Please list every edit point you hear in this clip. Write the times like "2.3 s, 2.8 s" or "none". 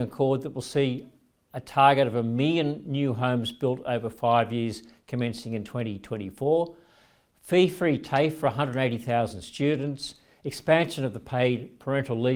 none